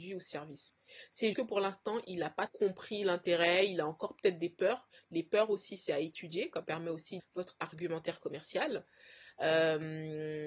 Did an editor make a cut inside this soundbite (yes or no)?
yes